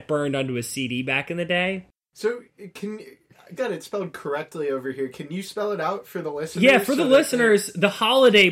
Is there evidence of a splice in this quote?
yes; 1 cut; at 3.6 s

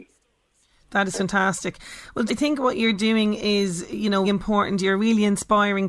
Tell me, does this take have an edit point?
yes; 2 cuts; at 2.3 s, 4.2 s

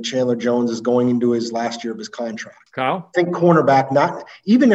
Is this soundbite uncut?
no; 1 cut; at 2.7 s

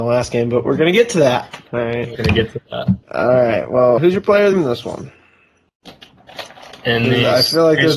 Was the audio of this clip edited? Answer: yes; 4 cuts; at 2.1 s, 3.0 s, 4.0 s, 4.5 s

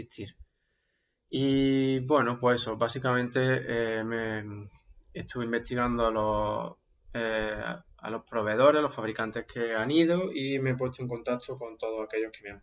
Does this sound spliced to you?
no; 0 cuts

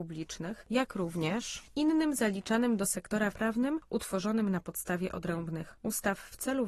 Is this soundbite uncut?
no; 1 cut; at 3.3 s

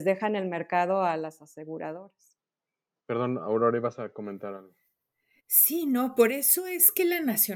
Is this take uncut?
yes; 0 cuts

